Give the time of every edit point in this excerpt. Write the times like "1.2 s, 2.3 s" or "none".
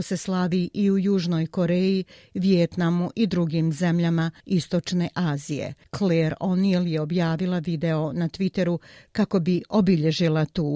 none

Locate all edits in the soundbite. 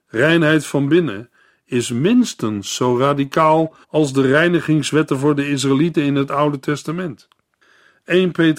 3.8 s

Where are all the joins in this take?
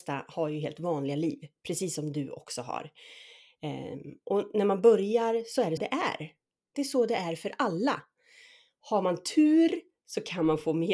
5.8 s

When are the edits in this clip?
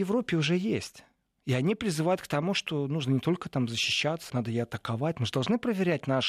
4.3 s

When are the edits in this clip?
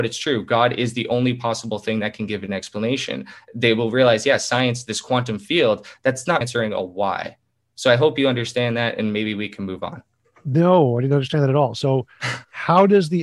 6.4 s

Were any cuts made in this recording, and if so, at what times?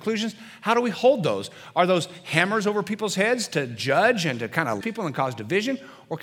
4.8 s

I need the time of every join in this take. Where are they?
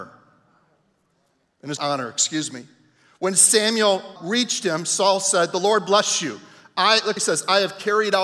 1.8 s, 4.2 s, 7.2 s

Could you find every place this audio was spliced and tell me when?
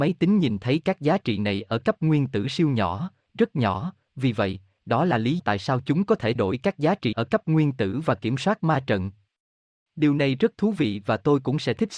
5.4 s, 6.4 s, 7.1 s

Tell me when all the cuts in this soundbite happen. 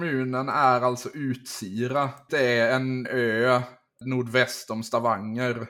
2.3 s, 3.0 s, 4.0 s

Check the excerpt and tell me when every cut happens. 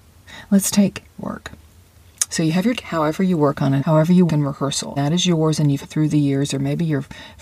1.2 s, 2.8 s, 3.8 s, 4.3 s, 5.0 s, 5.8 s

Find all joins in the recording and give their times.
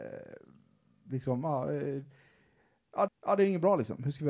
1.1 s, 3.1 s

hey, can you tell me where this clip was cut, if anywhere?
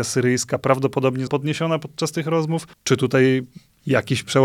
1.3 s, 2.7 s

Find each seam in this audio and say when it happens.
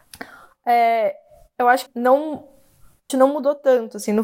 1.9 s, 3.1 s

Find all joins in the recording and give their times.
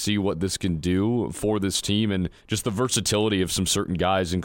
2.4 s

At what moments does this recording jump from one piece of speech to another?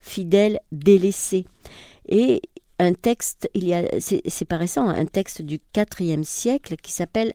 none

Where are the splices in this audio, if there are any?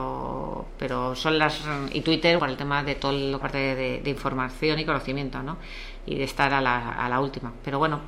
2.4 s, 3.4 s

